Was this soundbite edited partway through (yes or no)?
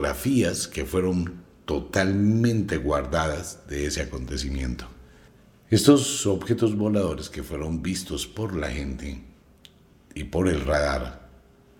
no